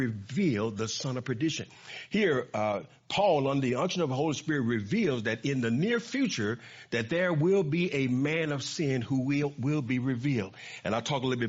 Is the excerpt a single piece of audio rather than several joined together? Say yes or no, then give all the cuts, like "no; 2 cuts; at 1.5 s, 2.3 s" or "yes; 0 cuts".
yes; 0 cuts